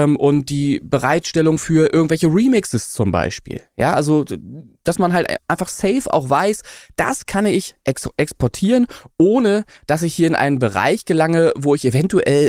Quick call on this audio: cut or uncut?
uncut